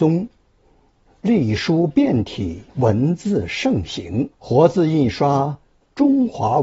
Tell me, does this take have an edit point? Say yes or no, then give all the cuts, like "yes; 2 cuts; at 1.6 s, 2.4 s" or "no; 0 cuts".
yes; 2 cuts; at 2.7 s, 4.3 s